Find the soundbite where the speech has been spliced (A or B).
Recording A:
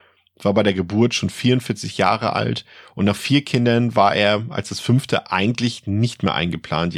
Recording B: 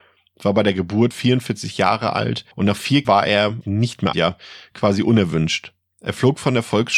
B